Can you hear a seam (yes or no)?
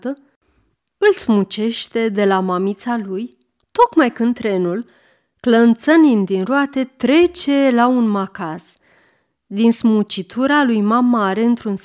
no